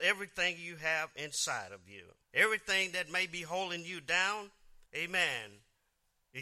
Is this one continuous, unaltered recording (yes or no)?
no